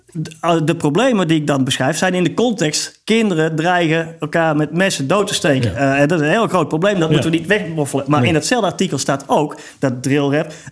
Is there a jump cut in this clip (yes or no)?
no